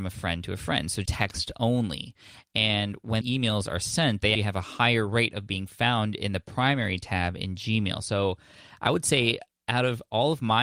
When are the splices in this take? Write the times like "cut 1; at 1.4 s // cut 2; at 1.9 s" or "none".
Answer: cut 1; at 1.0 s // cut 2; at 3.2 s // cut 3; at 4.3 s